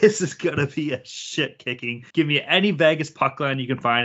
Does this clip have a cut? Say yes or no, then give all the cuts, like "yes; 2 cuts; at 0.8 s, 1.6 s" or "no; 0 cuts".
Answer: yes; 1 cut; at 2.1 s